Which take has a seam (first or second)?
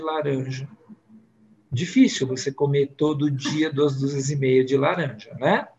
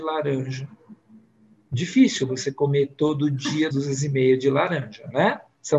second